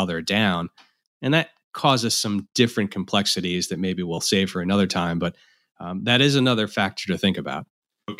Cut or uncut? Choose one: uncut